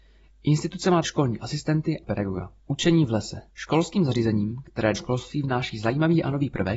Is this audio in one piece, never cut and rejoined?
no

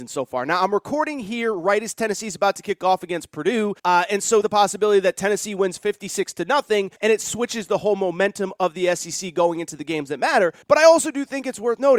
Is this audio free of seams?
no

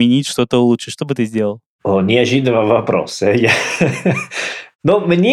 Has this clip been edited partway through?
no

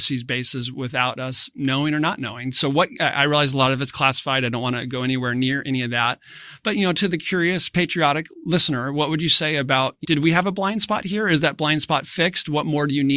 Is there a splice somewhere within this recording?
yes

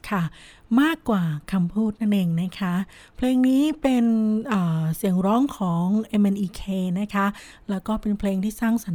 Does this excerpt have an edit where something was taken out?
no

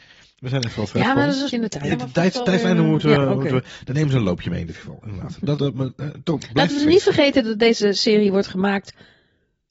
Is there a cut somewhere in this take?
yes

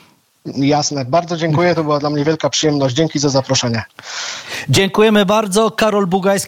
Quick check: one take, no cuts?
yes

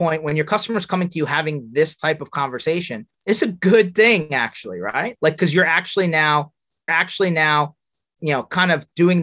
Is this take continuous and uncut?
no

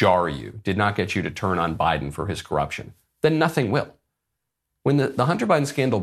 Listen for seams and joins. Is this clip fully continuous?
yes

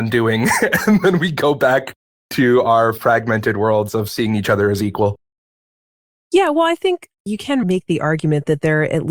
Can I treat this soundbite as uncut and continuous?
yes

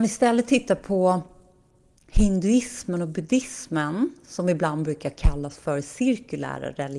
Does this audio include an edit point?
no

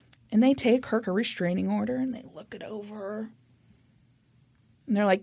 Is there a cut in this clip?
yes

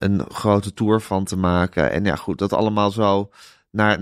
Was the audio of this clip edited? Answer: no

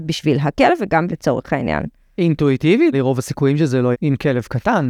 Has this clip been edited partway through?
yes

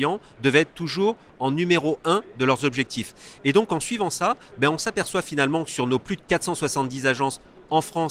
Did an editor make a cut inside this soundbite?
no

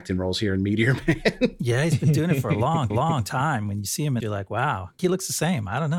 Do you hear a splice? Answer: yes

